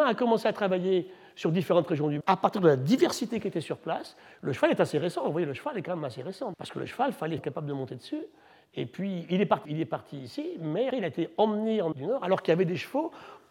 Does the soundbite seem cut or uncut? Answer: cut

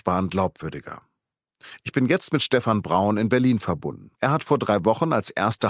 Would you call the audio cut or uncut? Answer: cut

